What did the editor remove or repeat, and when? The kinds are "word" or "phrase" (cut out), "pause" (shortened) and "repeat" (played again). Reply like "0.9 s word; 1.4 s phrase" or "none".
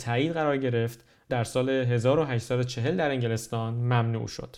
1.3 s phrase